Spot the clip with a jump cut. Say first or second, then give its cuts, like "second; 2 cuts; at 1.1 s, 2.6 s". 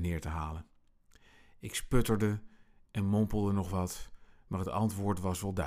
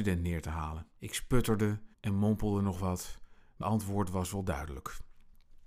second; 3 cuts; at 1.0 s, 1.9 s, 3.6 s